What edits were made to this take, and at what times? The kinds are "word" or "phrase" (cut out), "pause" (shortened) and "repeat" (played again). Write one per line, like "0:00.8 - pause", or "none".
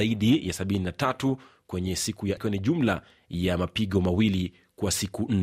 0:02.4 - word

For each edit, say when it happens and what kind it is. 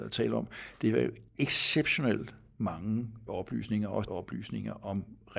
0:01.3 - pause
0:03.3 - word
0:04.1 - word

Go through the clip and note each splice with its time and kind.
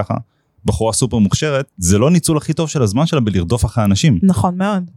0:01.7 - pause

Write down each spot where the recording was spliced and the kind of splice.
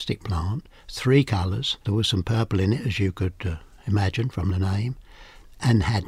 0:01.8 - pause

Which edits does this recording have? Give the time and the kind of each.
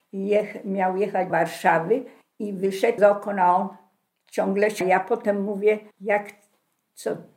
0:01.3 - word
0:02.2 - pause
0:03.0 - phrase
0:04.1 - pause
0:04.8 - word
0:05.9 - pause

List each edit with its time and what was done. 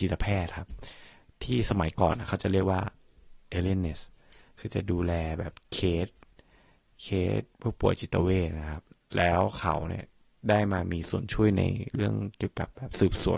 0:07.5 - pause

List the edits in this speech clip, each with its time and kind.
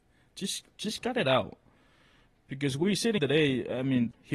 0:03.2 - word

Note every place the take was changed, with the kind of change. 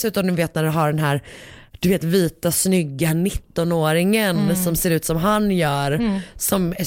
none

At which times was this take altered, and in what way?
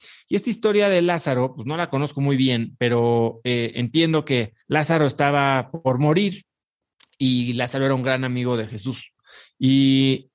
0:04.6 - pause

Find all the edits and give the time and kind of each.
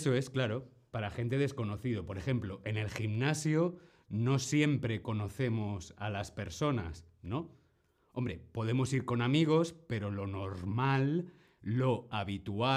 none

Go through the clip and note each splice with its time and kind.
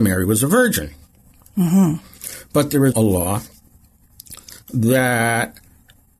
0:02.9 - word

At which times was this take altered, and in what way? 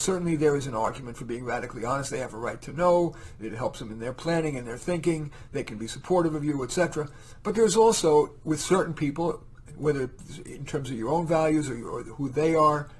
none

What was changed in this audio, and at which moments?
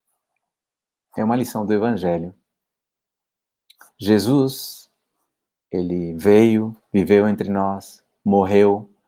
none

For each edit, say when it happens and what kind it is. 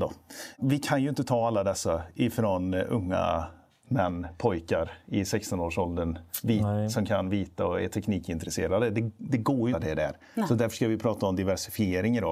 0:03.7 - pause
0:09.7 - phrase

